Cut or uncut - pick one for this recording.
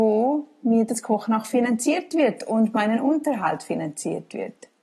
uncut